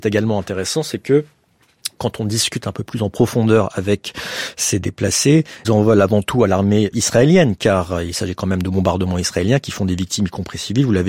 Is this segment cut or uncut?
cut